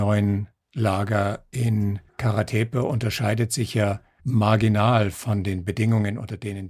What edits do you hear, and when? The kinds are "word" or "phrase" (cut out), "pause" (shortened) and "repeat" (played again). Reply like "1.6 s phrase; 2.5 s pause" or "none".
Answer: 2.1 s pause; 4.2 s word